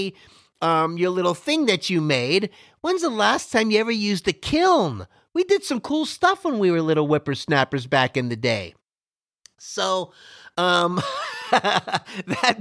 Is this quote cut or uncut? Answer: uncut